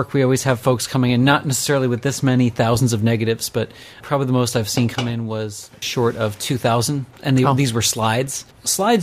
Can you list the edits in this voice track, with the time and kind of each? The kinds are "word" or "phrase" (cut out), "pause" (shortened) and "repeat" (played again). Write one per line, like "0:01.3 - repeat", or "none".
0:04.0 - word
0:05.8 - word